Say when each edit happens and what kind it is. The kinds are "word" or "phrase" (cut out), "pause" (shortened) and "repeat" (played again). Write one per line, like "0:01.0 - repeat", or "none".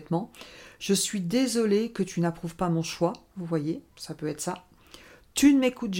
0:03.9 - pause